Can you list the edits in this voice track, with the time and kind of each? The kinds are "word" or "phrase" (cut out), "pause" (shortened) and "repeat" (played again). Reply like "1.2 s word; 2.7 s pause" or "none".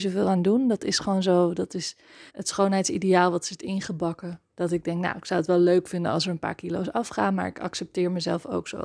2.3 s pause; 4.5 s pause